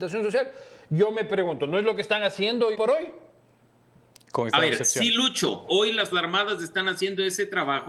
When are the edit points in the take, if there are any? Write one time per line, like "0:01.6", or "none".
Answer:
0:02.7
0:05.7
0:06.1